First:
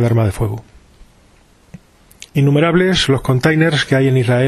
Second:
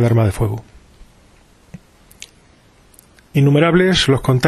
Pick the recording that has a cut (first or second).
first